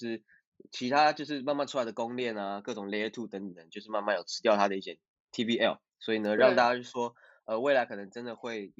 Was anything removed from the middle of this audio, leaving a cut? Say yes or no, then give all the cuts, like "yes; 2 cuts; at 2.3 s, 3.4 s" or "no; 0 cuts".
no; 0 cuts